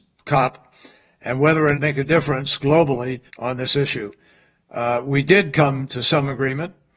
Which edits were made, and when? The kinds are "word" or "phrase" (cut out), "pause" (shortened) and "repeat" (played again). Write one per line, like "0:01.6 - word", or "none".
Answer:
0:01.7 - phrase
0:03.3 - pause